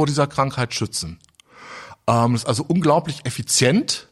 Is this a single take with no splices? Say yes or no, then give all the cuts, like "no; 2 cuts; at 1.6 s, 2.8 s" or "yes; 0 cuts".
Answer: yes; 0 cuts